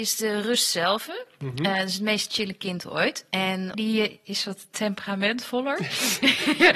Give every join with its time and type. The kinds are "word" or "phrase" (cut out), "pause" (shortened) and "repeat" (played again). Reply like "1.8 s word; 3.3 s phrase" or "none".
3.7 s phrase